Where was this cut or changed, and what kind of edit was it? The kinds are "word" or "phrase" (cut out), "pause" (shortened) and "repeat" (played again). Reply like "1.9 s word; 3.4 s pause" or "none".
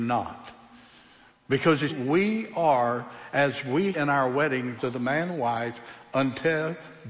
1.9 s word; 3.9 s word; 4.8 s word; 5.3 s word